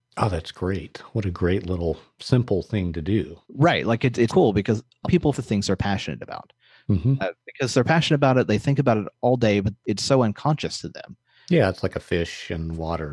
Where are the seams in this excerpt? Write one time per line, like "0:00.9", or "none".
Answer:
0:03.4
0:04.3
0:05.0
0:05.3
0:09.8